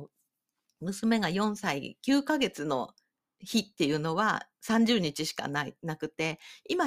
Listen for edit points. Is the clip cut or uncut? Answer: uncut